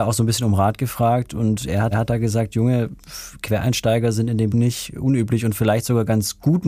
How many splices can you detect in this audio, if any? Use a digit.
2